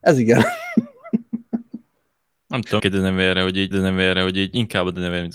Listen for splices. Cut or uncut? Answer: cut